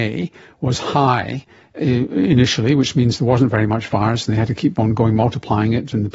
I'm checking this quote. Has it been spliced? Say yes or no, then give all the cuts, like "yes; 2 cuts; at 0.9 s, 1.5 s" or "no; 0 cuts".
no; 0 cuts